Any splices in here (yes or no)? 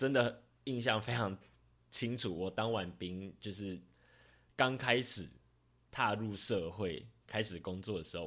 no